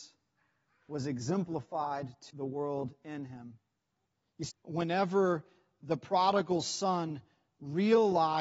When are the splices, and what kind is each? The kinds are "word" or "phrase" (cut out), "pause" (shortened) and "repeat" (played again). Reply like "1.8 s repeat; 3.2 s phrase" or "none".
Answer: 2.3 s word; 4.0 s pause; 4.5 s phrase